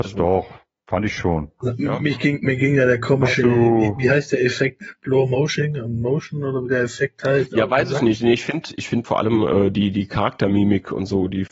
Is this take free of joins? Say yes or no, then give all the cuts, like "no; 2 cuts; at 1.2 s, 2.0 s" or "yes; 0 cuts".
no; 1 cut; at 9.0 s